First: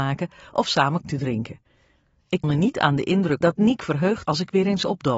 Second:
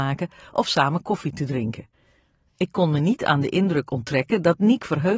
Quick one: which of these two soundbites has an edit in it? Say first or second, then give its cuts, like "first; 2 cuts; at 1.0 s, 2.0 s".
first; 4 cuts; at 1.0 s, 2.4 s, 3.4 s, 4.2 s